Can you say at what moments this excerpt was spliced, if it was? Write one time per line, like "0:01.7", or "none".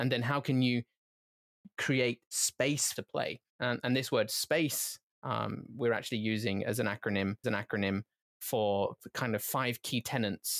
0:02.9
0:03.5
0:07.4